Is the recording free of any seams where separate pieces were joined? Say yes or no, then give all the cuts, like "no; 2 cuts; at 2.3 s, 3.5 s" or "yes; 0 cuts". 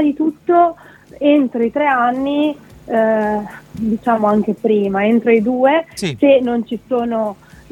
yes; 0 cuts